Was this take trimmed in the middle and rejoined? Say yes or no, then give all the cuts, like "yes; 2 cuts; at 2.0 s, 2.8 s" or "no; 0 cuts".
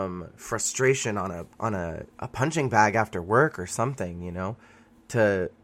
yes; 1 cut; at 1.5 s